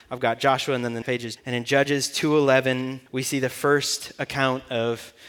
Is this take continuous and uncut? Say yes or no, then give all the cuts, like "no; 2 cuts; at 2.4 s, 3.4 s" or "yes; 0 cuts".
no; 3 cuts; at 1.0 s, 1.4 s, 3.1 s